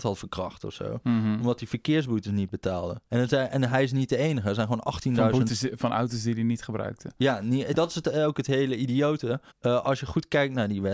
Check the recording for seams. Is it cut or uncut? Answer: cut